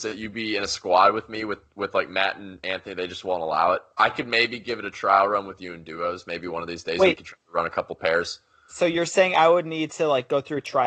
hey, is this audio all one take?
yes; 0 cuts

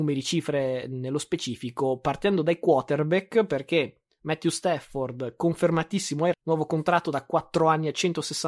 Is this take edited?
yes; 1 cut; at 6.3 s

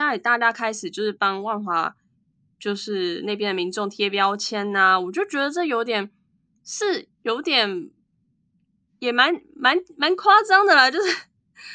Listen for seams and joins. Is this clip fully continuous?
yes; 0 cuts

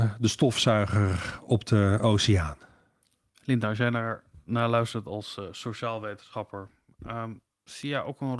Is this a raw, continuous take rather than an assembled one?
yes; 0 cuts

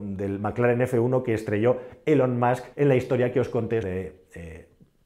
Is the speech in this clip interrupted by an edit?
yes; 2 cuts; at 2.7 s, 3.8 s

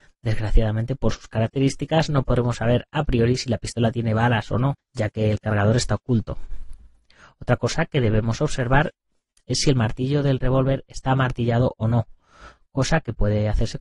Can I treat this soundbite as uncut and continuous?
no; 1 cut; at 4.8 s

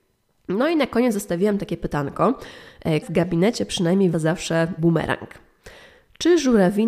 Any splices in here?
yes; 3 cuts; at 3.0 s, 4.1 s, 4.8 s

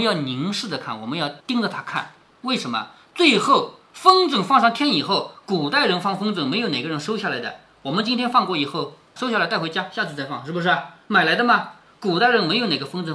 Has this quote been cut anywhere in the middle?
yes; 2 cuts; at 1.4 s, 9.2 s

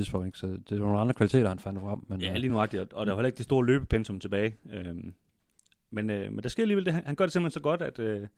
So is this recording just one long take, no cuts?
yes; 0 cuts

